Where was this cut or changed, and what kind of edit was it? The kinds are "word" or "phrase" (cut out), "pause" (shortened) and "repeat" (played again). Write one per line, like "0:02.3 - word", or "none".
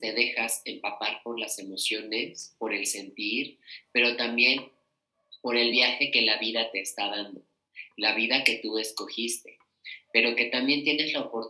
none